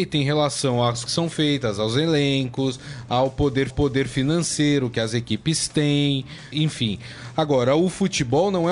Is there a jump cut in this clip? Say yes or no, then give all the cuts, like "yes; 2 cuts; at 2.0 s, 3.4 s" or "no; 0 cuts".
yes; 3 cuts; at 1.1 s, 3.7 s, 6.5 s